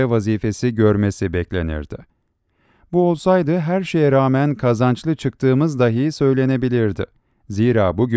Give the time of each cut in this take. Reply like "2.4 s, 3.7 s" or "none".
none